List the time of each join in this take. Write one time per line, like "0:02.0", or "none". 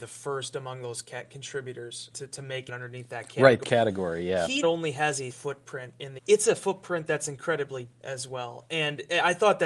0:02.1
0:02.7
0:03.6
0:04.6
0:05.3
0:06.2
0:07.9